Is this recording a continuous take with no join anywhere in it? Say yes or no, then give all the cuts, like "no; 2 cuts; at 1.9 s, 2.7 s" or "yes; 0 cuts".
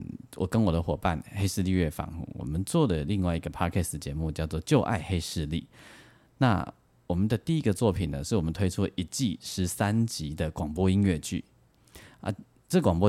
yes; 0 cuts